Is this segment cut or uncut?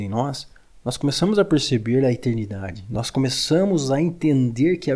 uncut